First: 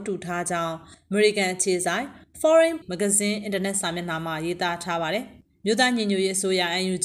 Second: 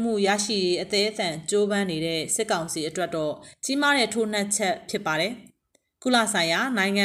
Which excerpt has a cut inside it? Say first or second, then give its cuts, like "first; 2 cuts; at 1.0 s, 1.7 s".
first; 1 cut; at 2.8 s